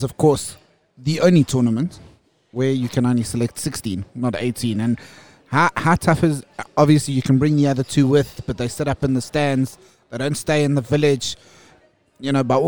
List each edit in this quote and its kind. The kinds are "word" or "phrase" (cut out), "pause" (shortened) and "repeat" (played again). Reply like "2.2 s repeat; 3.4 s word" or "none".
none